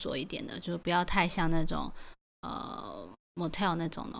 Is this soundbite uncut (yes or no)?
yes